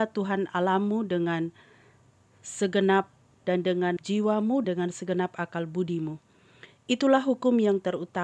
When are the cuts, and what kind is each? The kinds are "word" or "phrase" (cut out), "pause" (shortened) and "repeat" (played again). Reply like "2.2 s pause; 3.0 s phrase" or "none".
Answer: 3.4 s word; 4.0 s word; 4.6 s word